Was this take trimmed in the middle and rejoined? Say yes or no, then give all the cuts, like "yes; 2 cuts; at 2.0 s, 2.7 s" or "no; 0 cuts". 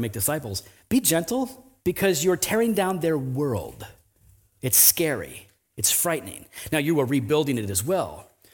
yes; 1 cut; at 1.8 s